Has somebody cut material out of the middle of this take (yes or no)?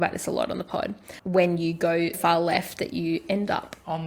yes